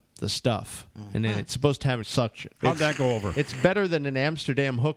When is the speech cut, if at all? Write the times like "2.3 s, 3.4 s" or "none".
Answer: 0.9 s, 2.0 s, 2.6 s